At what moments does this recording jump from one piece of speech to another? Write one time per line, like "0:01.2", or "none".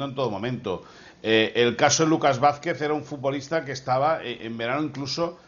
none